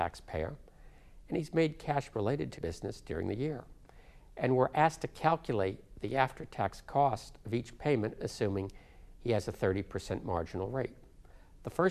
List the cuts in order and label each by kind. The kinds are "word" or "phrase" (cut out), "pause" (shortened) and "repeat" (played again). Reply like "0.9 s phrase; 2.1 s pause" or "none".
2.1 s word; 2.6 s word